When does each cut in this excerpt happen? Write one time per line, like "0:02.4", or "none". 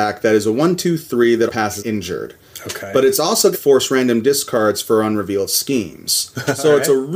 0:01.5
0:01.8
0:03.5